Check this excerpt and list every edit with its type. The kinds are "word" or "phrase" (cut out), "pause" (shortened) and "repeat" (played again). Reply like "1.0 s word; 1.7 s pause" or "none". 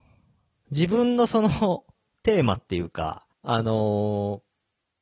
3.3 s pause

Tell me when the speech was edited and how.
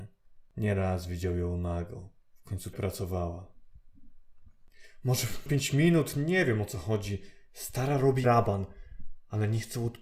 2.7 s word; 5.5 s word; 8.2 s word

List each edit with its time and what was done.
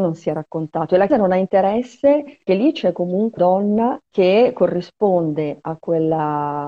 1.1 s word; 2.5 s phrase; 3.4 s word; 4.1 s pause

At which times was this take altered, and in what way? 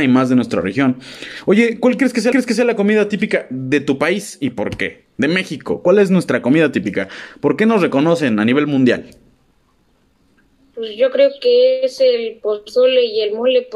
2.3 s repeat

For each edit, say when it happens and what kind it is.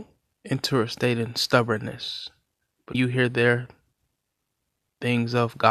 2.9 s word

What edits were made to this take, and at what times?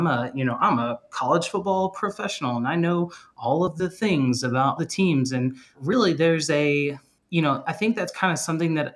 4.8 s word; 5.7 s word; 7.2 s pause

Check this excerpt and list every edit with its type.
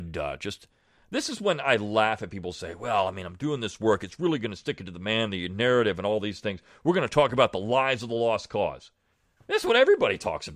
9.1 s pause

